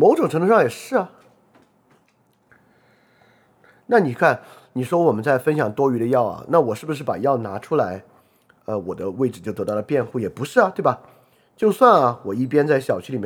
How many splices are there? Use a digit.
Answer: 0